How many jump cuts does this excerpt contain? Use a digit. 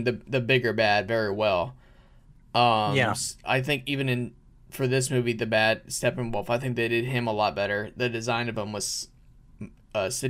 0